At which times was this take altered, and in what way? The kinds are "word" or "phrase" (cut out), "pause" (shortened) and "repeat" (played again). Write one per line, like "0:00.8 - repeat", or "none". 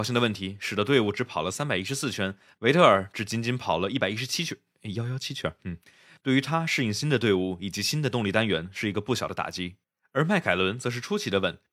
none